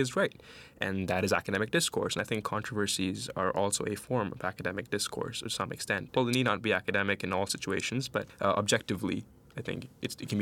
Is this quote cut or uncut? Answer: uncut